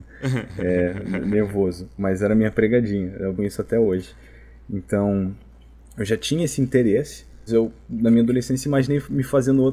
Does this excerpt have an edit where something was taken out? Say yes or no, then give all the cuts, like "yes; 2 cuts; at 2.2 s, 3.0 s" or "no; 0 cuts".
yes; 2 cuts; at 3.4 s, 7.5 s